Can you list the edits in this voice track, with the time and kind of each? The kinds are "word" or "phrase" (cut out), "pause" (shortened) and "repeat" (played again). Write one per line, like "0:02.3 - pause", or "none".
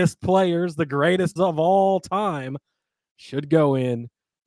0:01.4 - word